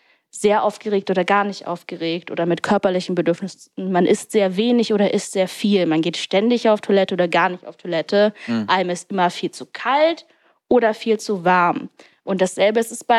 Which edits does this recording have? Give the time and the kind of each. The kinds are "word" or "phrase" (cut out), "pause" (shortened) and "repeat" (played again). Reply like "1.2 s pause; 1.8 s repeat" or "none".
none